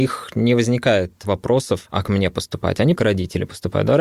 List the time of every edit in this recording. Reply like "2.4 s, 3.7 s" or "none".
2.0 s, 3.0 s